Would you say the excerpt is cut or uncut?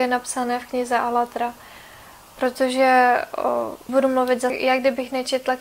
cut